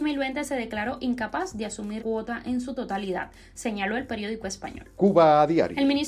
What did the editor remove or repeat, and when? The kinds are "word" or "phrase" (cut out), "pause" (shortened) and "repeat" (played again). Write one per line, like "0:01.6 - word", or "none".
0:02.0 - word